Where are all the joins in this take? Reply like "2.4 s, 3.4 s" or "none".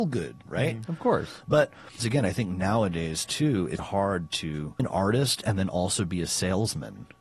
2.0 s, 3.8 s, 4.8 s